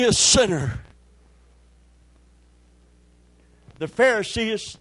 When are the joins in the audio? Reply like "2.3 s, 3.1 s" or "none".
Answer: none